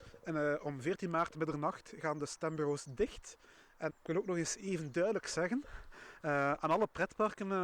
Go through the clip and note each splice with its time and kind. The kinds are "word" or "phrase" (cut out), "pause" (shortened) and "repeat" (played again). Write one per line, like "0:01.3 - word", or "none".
0:03.9 - word